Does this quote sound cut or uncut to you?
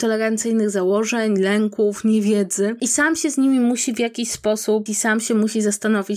cut